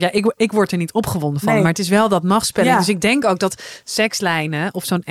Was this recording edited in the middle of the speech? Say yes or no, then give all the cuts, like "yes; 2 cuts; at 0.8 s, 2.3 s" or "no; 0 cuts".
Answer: no; 0 cuts